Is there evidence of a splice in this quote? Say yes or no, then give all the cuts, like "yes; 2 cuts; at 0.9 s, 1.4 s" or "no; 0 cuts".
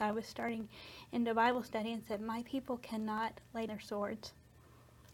yes; 1 cut; at 3.7 s